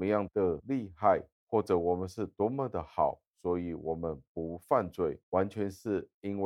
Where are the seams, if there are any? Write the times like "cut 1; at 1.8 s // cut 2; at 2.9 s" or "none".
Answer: cut 1; at 1.3 s // cut 2; at 5.2 s